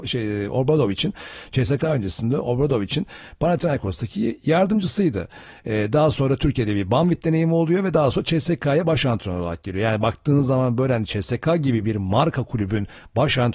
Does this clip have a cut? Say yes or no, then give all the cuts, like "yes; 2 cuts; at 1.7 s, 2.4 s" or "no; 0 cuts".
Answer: no; 0 cuts